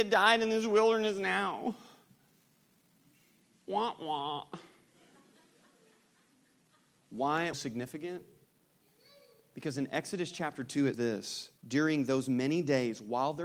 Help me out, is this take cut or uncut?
cut